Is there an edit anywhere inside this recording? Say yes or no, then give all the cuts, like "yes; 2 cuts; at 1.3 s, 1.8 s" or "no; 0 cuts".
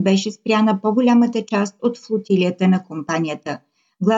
no; 0 cuts